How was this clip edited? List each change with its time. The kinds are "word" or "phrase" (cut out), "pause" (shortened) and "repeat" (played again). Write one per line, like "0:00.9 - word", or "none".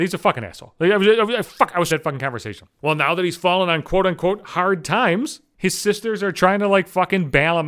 0:01.9 - phrase